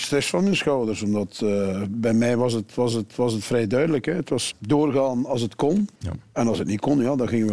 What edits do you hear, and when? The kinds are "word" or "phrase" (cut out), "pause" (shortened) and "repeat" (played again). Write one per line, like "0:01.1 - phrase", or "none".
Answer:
0:02.9 - repeat
0:04.5 - word
0:05.9 - pause